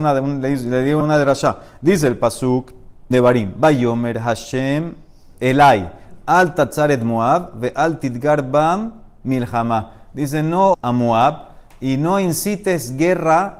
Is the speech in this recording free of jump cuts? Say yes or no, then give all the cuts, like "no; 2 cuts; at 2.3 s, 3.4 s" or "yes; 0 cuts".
no; 3 cuts; at 1.0 s, 3.1 s, 10.7 s